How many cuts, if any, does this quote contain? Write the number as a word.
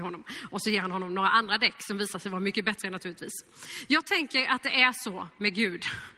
zero